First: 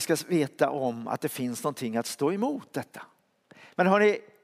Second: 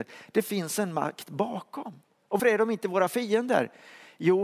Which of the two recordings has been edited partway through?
second; 1 cut; at 2.4 s

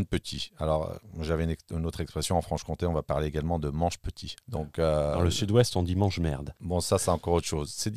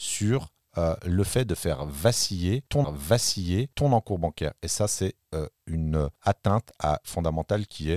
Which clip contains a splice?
second; 3 cuts; at 2.8 s, 6.2 s, 7.0 s

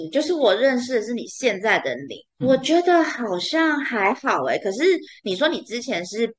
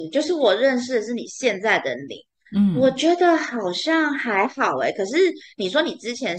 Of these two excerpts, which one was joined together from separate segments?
first; 1 cut; at 2.4 s

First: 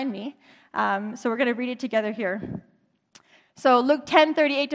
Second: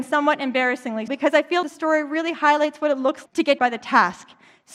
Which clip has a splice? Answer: second; 4 cuts; at 1.1 s, 1.6 s, 3.3 s, 3.6 s

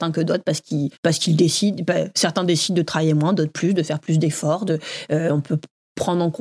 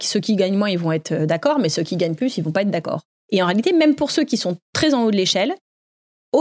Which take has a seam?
first; 1 cut; at 0.9 s

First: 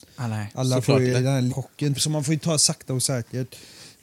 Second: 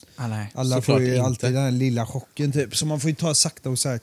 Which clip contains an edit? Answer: first; 3 cuts; at 1.1 s, 1.5 s, 1.9 s

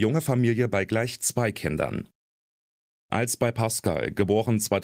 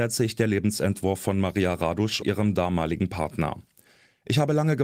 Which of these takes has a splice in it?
second; 1 cut; at 2.2 s

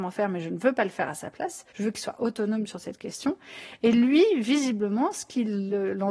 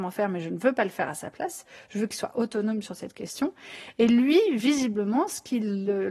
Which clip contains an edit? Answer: first; 1 cut; at 1.7 s

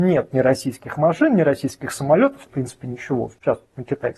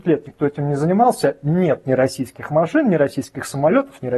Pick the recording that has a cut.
first; 1 cut; at 2.5 s

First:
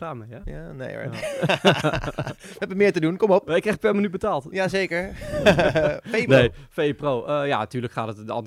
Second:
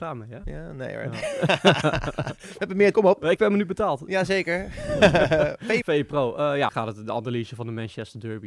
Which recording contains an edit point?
second; 4 cuts; at 2.9 s, 3.4 s, 5.8 s, 6.7 s

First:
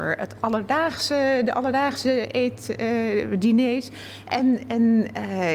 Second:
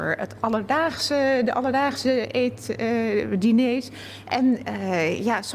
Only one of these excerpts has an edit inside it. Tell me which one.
second; 1 cut; at 4.6 s

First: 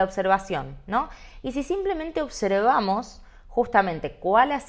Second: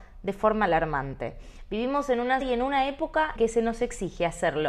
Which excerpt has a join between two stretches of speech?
second; 2 cuts; at 2.4 s, 3.4 s

